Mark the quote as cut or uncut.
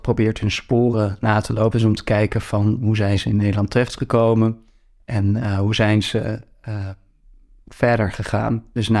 uncut